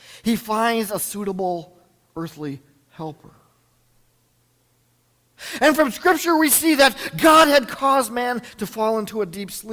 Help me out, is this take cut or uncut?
uncut